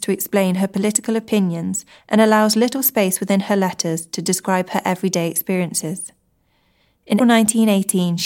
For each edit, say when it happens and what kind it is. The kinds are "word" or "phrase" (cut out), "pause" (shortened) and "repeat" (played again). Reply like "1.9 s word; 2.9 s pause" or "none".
7.2 s word